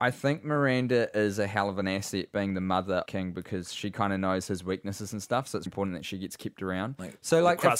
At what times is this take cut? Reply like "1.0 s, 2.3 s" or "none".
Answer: 3.1 s, 5.7 s